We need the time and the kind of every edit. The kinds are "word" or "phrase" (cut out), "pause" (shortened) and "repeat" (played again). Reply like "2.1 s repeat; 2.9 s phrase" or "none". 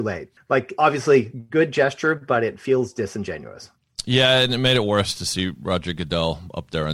none